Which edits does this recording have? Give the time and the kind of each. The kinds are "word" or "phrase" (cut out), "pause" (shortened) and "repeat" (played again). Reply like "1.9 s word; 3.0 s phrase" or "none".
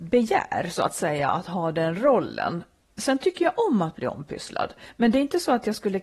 none

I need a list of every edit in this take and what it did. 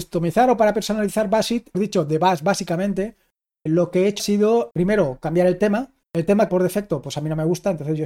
1.7 s phrase; 3.7 s word; 4.2 s word; 4.7 s word; 6.0 s pause; 6.5 s word

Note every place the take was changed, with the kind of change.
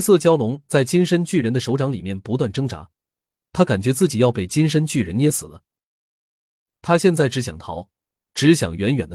none

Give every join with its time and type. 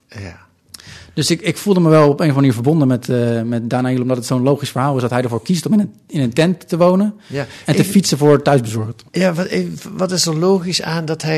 9.1 s pause

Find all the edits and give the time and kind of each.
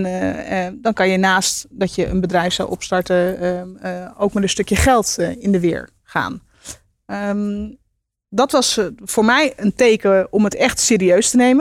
none

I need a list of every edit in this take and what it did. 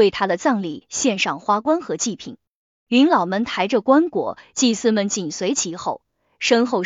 none

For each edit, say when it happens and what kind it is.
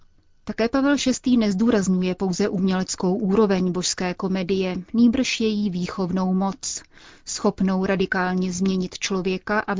none

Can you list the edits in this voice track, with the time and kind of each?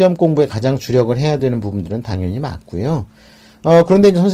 none

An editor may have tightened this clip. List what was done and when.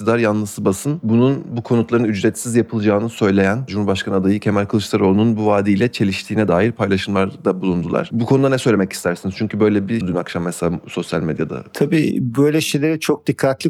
10.0 s phrase

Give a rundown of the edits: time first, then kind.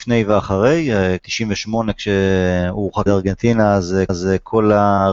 1.2 s word; 3.1 s word; 4.1 s repeat

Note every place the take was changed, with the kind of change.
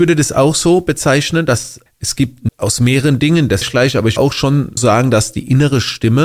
1.9 s word; 2.5 s word; 3.6 s word; 4.2 s word; 4.8 s word

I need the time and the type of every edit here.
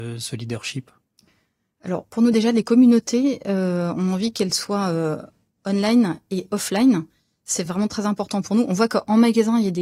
none

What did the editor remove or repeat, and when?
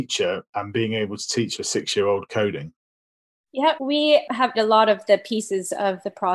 3.8 s word; 4.5 s word

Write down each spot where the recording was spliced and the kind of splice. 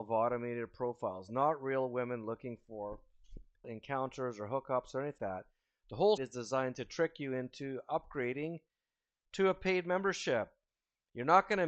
3.6 s word; 5.2 s word; 6.2 s word

